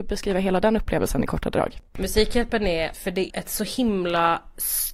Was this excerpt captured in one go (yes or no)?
no